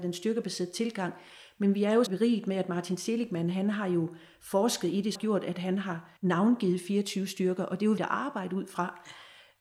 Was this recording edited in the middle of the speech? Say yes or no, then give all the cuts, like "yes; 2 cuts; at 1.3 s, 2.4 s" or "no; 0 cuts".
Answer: yes; 4 cuts; at 2.1 s, 5.1 s, 6.2 s, 8.0 s